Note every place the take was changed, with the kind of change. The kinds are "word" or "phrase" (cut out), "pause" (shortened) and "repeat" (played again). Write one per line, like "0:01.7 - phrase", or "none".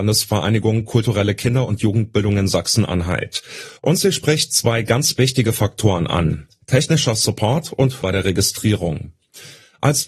0:03.8 - pause
0:08.0 - word